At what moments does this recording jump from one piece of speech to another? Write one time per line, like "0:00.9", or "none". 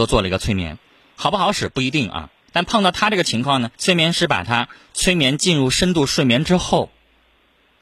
0:02.4
0:03.7

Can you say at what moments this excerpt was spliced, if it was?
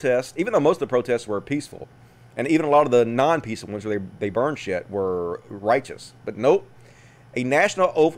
none

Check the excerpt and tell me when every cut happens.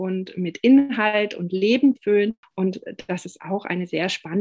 0:02.0

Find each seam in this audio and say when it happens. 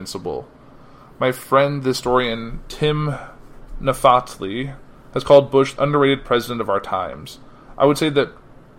0:05.8

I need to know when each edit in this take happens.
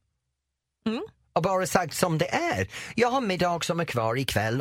none

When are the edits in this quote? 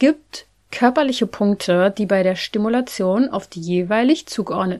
none

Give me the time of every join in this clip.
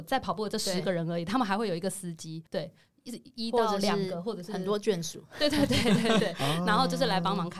0:02.5

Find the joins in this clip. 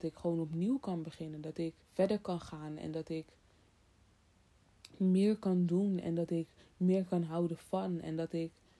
0:01.8

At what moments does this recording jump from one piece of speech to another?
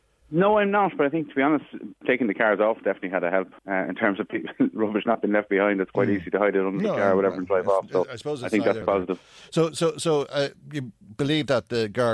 0:02.8
0:03.6
0:08.8
0:10.6

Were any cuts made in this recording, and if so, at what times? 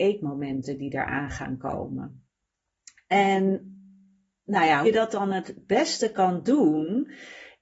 0:04.8

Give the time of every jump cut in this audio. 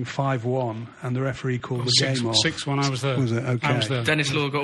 none

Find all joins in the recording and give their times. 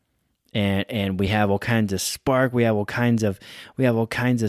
none

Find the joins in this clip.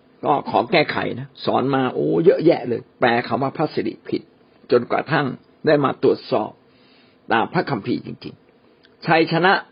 0:01.3
0:02.9

